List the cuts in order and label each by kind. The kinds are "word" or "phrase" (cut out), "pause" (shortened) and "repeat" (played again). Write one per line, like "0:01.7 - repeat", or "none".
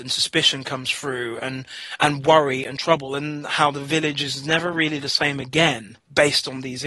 none